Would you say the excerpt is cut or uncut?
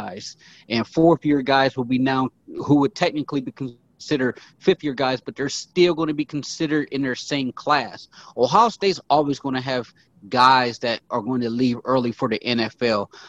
uncut